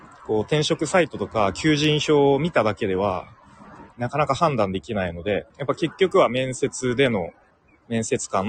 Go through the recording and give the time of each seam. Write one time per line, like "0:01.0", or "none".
0:05.5
0:07.5